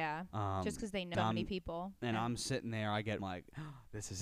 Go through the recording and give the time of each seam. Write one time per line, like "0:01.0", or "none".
0:01.1
0:03.2

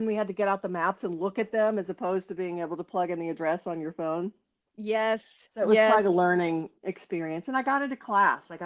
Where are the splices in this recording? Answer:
0:06.8

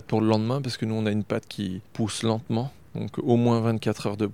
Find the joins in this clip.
none

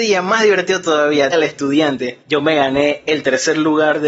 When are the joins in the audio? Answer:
0:01.3
0:02.2

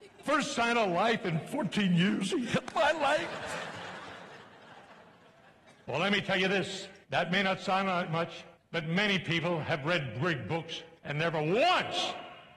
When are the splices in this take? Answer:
0:07.0
0:08.5
0:11.0

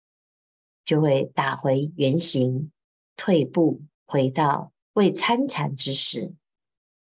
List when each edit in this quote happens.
0:02.8
0:03.9
0:04.8

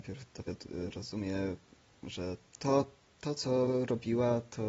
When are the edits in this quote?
0:02.5

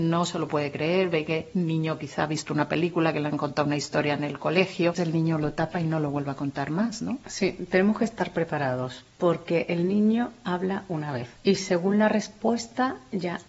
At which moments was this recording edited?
0:05.0

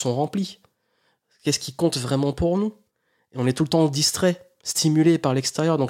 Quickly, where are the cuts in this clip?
none

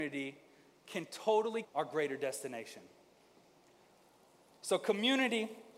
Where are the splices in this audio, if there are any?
0:01.6

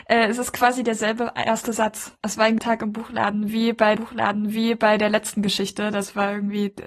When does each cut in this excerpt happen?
0:02.1
0:02.6
0:04.0

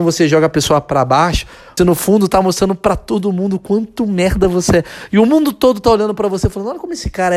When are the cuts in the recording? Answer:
0:01.8

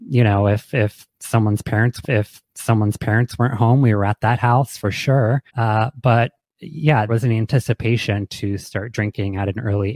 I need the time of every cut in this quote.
0:02.0
0:05.5
0:07.1

